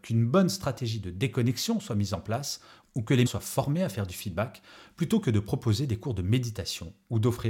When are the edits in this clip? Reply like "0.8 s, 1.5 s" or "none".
3.3 s

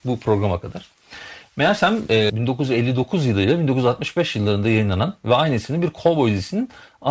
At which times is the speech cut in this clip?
2.3 s

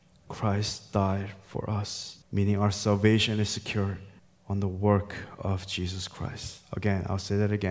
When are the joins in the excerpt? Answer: 2.2 s, 4.2 s

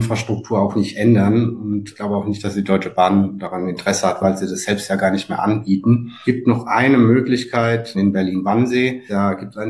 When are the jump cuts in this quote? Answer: none

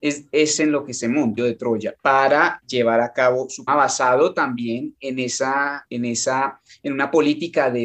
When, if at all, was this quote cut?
1.4 s, 2.6 s, 3.7 s, 5.9 s

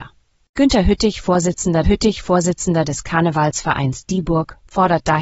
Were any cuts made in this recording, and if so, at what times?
1.8 s

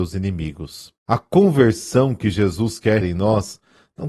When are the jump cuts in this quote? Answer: 1.0 s, 3.0 s

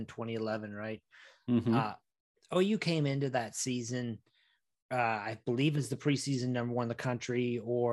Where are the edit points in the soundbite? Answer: none

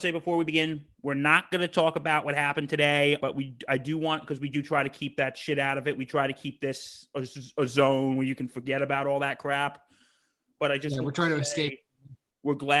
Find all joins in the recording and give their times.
3.2 s

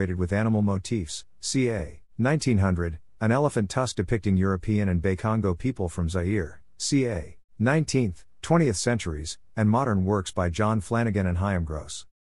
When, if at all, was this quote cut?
2.1 s, 7.5 s

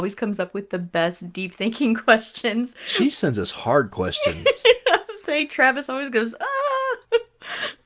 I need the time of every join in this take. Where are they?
none

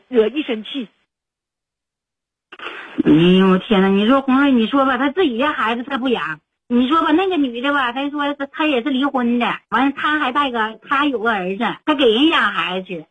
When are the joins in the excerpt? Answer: 9.6 s, 11.8 s

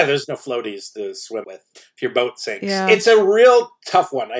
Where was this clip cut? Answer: 1.4 s

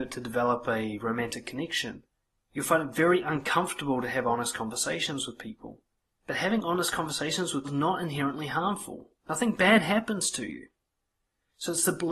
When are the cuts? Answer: 2.2 s, 6.0 s, 7.6 s

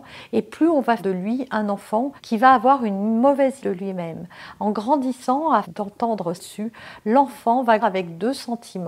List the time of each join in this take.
1.0 s, 2.2 s, 3.6 s, 5.6 s, 6.4 s, 7.8 s

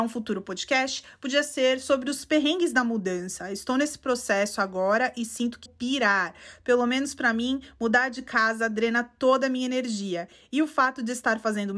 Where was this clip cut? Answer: 5.7 s

